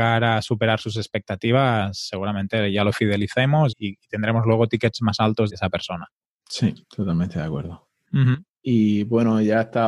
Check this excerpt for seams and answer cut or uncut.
cut